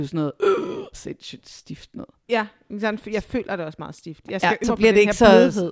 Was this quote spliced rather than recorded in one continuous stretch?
yes; 1 cut; at 4.6 s

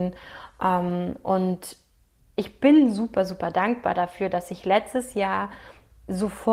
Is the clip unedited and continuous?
yes; 0 cuts

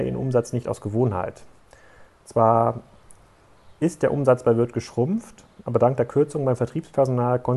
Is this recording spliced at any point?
no; 0 cuts

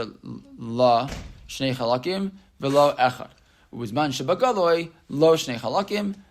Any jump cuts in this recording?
no; 0 cuts

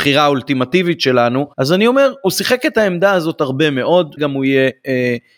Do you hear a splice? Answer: yes; 2 cuts; at 1.5 s, 4.2 s

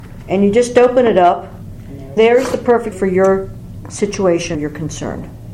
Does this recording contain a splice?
yes; 3 cuts; at 2.2 s, 2.9 s, 4.5 s

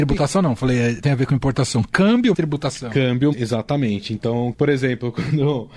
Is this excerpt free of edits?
no; 4 cuts; at 1.0 s, 2.3 s, 3.3 s, 4.5 s

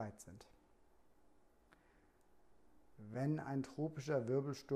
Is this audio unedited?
yes; 0 cuts

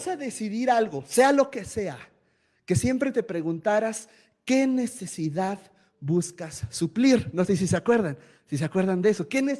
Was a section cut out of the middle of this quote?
no; 0 cuts

